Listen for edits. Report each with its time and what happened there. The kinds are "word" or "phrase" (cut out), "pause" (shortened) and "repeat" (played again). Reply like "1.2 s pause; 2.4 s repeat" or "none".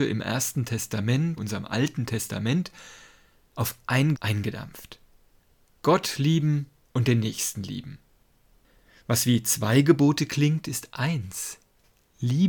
1.4 s word; 4.1 s word